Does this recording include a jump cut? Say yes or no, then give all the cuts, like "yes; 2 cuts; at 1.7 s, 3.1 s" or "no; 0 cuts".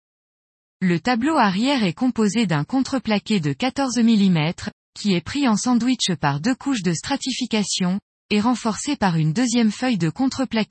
no; 0 cuts